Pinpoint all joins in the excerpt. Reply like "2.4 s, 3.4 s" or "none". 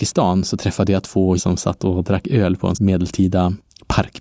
1.4 s, 2.7 s